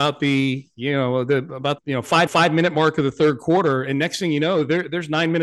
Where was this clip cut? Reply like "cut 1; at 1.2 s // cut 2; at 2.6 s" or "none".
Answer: cut 1; at 1.8 s // cut 2; at 2.3 s